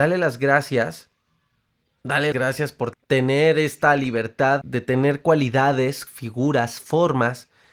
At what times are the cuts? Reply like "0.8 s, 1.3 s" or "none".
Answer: 2.3 s, 2.9 s, 4.6 s, 6.1 s